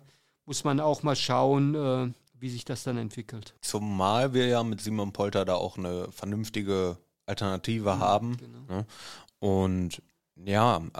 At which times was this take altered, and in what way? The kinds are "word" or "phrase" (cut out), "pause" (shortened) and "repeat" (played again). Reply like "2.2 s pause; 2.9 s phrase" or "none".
3.6 s pause